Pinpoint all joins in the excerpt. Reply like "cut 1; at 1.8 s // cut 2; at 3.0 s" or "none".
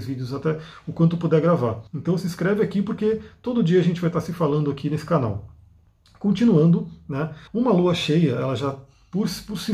cut 1; at 1.9 s // cut 2; at 7.5 s